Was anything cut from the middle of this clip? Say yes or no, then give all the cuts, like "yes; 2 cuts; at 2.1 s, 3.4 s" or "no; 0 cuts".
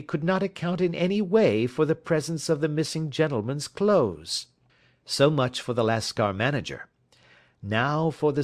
yes; 1 cut; at 4.7 s